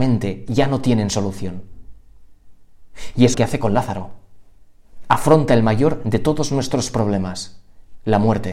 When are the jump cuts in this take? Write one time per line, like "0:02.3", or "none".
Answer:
0:03.3